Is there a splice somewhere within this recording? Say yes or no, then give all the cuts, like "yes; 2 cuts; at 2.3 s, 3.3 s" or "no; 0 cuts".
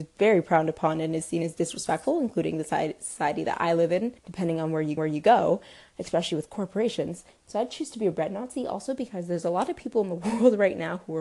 yes; 2 cuts; at 4.2 s, 5.0 s